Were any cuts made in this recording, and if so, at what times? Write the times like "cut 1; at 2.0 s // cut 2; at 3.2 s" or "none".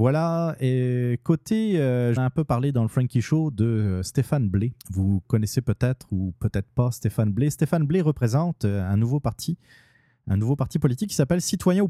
cut 1; at 2.2 s // cut 2; at 4.8 s